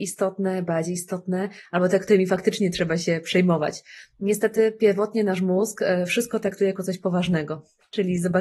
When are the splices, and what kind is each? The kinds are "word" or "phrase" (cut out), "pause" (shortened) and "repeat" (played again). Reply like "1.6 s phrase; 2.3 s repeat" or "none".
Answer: none